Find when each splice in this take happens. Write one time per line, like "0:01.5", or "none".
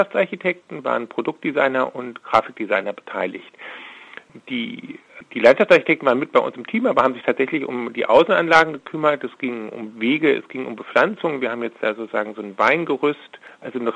none